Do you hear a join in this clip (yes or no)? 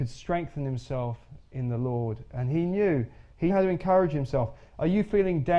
yes